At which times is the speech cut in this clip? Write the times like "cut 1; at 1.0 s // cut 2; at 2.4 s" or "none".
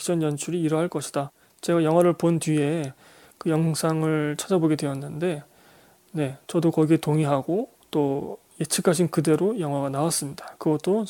cut 1; at 7.8 s